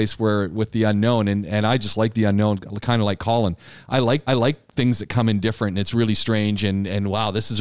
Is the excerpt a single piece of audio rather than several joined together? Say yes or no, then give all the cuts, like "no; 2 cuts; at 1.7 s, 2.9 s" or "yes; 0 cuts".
no; 1 cut; at 4.3 s